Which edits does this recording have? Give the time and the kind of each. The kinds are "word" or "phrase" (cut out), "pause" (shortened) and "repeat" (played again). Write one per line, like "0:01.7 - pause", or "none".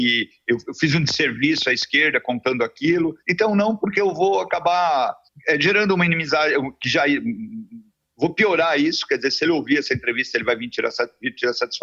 0:03.2 - pause
0:05.3 - pause